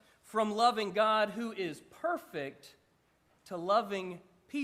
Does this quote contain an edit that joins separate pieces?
no; 0 cuts

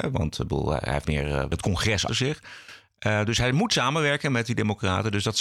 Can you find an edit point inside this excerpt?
yes; 2 cuts; at 1.0 s, 2.1 s

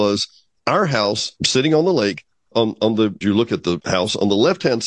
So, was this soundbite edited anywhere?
yes; 3 cuts; at 1.4 s, 2.5 s, 3.2 s

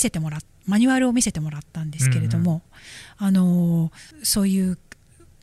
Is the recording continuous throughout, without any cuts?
no; 1 cut; at 4.1 s

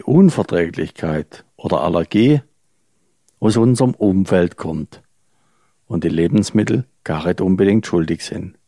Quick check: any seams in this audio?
no; 0 cuts

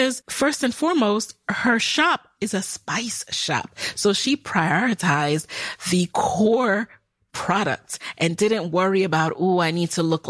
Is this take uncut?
yes; 0 cuts

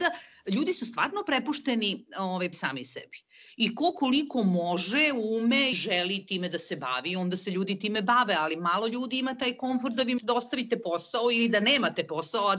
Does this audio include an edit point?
yes; 3 cuts; at 2.5 s, 5.7 s, 10.2 s

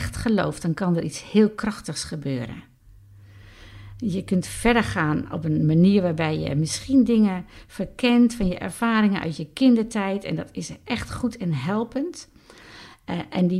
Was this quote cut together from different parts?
no; 0 cuts

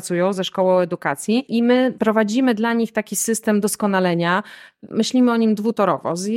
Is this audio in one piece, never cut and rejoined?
yes; 0 cuts

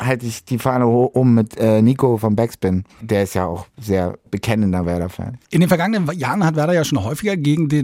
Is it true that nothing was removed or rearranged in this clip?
no; 2 cuts; at 2.9 s, 5.4 s

